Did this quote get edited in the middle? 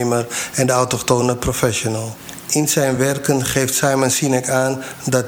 no; 0 cuts

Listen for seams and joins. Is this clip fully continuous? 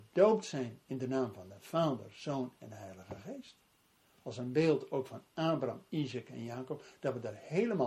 yes; 0 cuts

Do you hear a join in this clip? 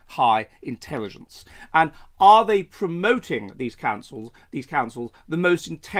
no; 0 cuts

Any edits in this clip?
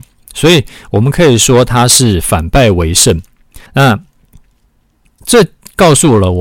yes; 1 cut; at 3.7 s

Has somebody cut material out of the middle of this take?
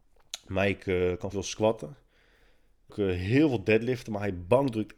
yes; 2 cuts; at 1.3 s, 2.9 s

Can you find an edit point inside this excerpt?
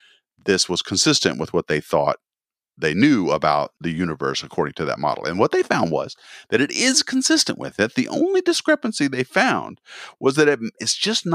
no; 0 cuts

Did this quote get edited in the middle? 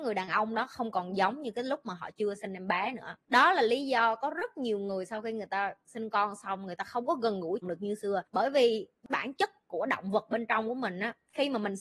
yes; 1 cut; at 7.6 s

